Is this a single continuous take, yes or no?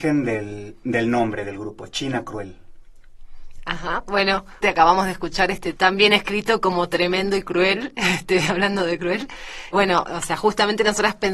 no